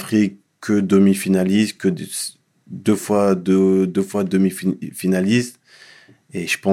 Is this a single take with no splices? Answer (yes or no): yes